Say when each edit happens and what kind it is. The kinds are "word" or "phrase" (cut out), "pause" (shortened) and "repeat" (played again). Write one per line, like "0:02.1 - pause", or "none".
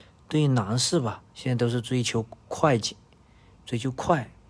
0:01.3 - pause